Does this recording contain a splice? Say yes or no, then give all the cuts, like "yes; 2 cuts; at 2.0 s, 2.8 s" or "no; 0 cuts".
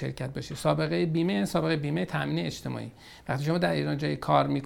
no; 0 cuts